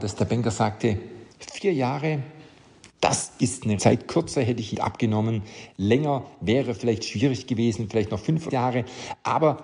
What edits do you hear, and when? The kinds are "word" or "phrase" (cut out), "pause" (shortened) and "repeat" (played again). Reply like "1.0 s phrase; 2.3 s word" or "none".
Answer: 1.3 s pause; 3.8 s word; 4.7 s word; 8.5 s word